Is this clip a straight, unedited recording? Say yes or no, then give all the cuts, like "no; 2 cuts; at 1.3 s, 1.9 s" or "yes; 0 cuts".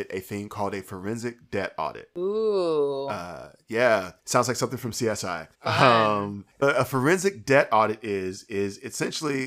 no; 3 cuts; at 4.2 s, 5.5 s, 6.6 s